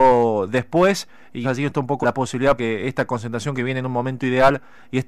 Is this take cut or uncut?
cut